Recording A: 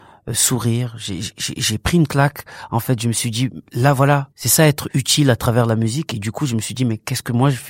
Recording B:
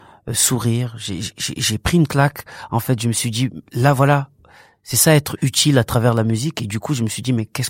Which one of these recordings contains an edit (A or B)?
A